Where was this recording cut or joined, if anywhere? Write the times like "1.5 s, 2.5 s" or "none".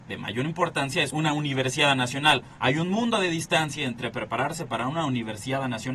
1.1 s